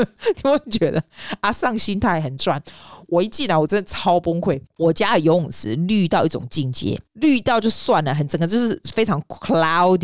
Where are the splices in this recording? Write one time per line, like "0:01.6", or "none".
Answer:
0:04.7
0:07.1